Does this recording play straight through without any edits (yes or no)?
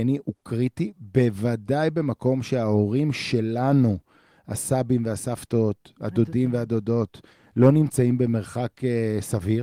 yes